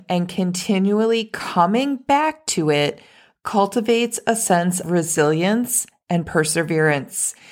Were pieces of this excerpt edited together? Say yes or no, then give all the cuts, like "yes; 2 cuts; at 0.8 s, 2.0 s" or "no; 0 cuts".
yes; 1 cut; at 4.8 s